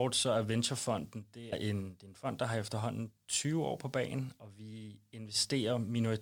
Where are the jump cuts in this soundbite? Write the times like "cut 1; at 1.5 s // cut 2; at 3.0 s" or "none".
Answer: cut 1; at 1.5 s